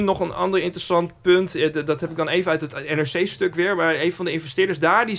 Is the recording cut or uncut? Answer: uncut